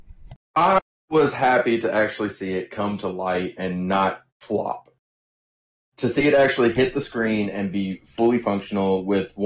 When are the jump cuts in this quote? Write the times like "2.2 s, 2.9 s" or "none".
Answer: 4.3 s

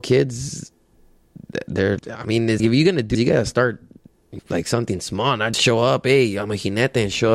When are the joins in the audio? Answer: 2.0 s, 2.6 s, 3.1 s, 4.4 s, 5.5 s

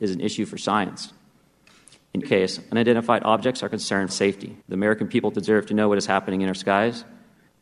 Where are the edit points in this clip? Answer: 2.2 s, 4.1 s, 4.6 s

